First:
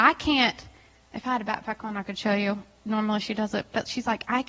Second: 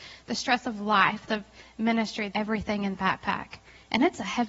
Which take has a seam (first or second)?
second